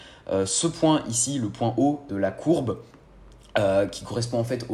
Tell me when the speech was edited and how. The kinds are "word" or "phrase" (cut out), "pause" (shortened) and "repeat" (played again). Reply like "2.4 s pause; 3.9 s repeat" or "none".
2.1 s word